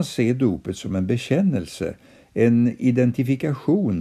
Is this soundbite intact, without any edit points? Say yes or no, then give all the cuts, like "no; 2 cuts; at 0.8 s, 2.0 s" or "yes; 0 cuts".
yes; 0 cuts